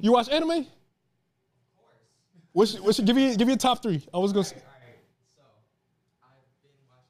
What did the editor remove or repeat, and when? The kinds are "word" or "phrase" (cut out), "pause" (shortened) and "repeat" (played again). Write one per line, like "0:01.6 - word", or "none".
none